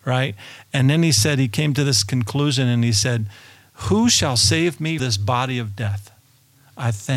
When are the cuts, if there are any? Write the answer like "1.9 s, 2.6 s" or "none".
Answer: 5.0 s